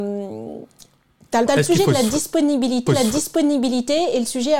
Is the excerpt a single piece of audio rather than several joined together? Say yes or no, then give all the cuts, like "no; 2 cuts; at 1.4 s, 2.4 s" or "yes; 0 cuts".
no; 2 cuts; at 1.5 s, 2.9 s